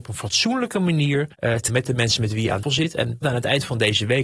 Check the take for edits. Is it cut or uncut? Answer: cut